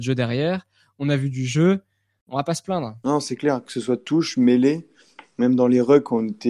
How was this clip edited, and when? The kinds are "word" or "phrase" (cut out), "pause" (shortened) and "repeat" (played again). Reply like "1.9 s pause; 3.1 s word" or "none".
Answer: none